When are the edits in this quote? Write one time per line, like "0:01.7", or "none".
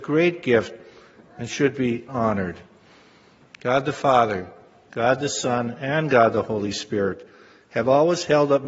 0:02.1